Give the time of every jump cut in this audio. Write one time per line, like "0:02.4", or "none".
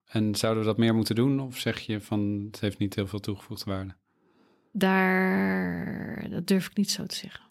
none